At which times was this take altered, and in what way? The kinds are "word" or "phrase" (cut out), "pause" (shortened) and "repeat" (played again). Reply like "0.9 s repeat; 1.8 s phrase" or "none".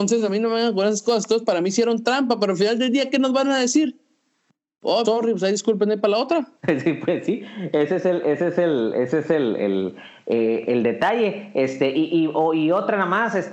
5.0 s word; 6.6 s pause